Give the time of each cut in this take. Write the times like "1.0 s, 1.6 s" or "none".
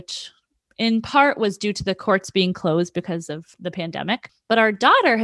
3.5 s